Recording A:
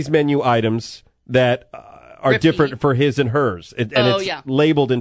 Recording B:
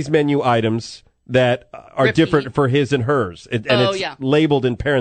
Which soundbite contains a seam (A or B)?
B